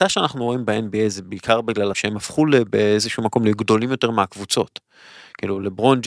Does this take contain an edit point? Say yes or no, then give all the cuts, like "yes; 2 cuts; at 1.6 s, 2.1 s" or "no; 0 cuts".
yes; 1 cut; at 1.9 s